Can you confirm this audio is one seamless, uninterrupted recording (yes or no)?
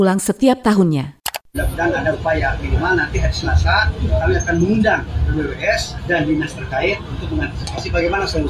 yes